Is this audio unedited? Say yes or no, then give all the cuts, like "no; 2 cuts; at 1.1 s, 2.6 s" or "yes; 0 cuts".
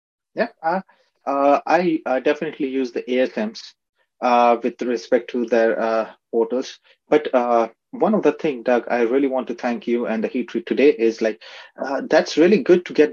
yes; 0 cuts